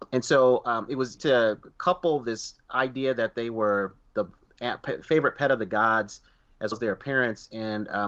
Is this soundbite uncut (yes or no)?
no